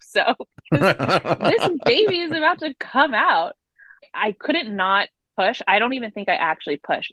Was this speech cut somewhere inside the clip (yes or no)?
no